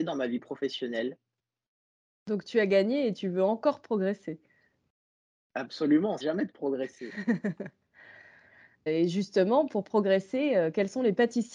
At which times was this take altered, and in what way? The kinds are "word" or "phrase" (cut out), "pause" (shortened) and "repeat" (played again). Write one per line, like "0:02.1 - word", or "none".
0:06.2 - word
0:08.9 - word